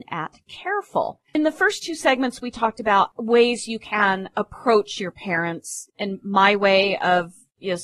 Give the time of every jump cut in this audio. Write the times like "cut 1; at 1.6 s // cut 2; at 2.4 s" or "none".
cut 1; at 1.3 s // cut 2; at 5.9 s